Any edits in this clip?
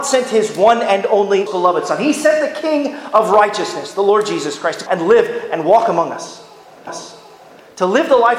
yes; 3 cuts; at 1.5 s, 4.9 s, 6.9 s

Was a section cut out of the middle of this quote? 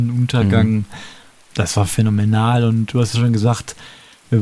no; 0 cuts

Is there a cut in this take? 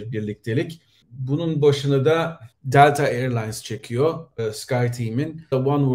no; 0 cuts

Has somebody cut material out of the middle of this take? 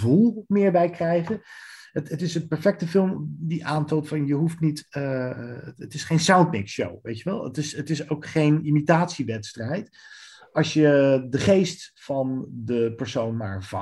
no; 0 cuts

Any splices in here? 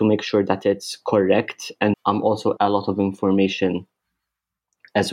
yes; 2 cuts; at 1.9 s, 2.6 s

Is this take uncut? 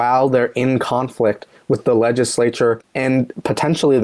yes; 0 cuts

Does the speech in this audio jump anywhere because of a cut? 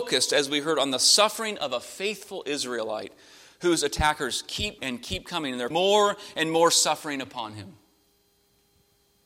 yes; 2 cuts; at 4.8 s, 5.7 s

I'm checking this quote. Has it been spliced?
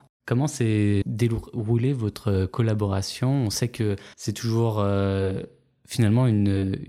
yes; 2 cuts; at 1.0 s, 4.1 s

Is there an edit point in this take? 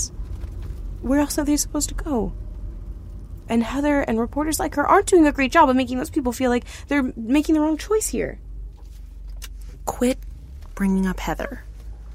no; 0 cuts

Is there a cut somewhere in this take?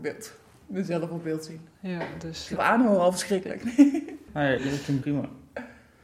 yes; 4 cuts; at 1.7 s, 2.6 s, 4.6 s, 5.0 s

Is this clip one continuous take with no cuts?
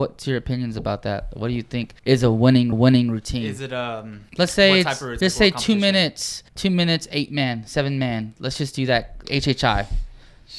no; 6 cuts; at 2.0 s, 2.7 s, 4.3 s, 5.2 s, 6.5 s, 9.2 s

